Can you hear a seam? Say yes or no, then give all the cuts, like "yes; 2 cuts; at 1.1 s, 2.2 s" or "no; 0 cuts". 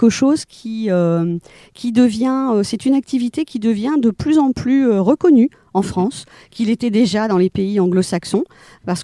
no; 0 cuts